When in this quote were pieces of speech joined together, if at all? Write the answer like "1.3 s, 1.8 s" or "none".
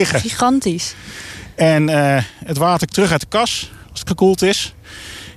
2.9 s, 4.1 s